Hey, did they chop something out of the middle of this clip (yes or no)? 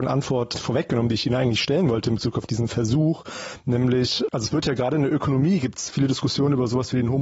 no